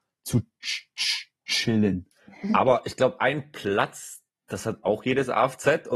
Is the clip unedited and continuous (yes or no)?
yes